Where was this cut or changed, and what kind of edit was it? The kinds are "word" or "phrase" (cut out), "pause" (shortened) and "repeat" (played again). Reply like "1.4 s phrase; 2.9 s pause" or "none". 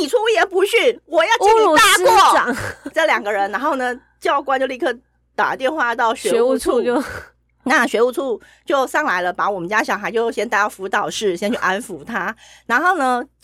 2.9 s word

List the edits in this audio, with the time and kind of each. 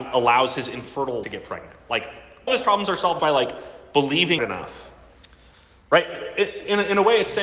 1.2 s word; 2.5 s word; 3.2 s word; 4.4 s word

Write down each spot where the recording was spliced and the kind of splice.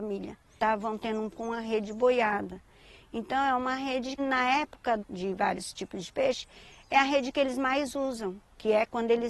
1.3 s word; 4.2 s word; 5.0 s word

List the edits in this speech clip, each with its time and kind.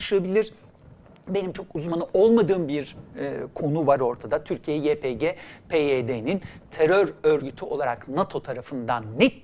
none

